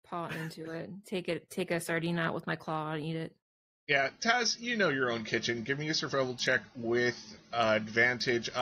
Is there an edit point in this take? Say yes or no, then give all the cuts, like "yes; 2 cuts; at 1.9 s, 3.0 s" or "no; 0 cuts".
no; 0 cuts